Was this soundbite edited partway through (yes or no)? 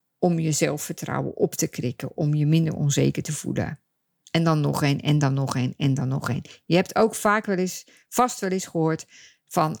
no